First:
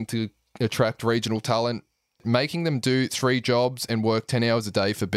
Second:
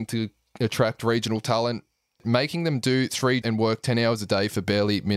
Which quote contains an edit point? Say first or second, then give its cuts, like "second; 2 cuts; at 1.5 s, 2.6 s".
second; 1 cut; at 3.4 s